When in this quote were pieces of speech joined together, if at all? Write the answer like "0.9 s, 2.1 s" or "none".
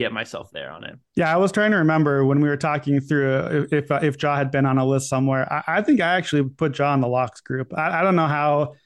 1.1 s